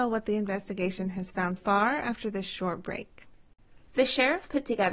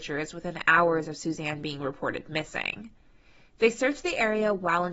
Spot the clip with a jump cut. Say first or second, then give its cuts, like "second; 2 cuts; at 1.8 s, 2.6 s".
first; 1 cut; at 1.6 s